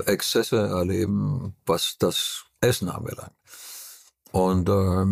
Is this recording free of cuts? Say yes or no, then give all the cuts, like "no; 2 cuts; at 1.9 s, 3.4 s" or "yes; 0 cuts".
yes; 0 cuts